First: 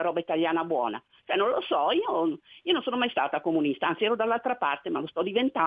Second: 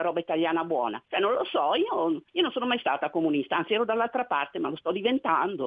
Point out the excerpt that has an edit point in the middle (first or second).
second